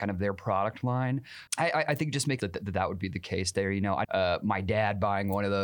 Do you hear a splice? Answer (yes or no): yes